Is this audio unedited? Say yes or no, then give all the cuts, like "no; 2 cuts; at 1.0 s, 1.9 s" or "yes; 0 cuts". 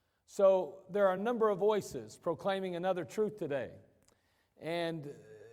yes; 0 cuts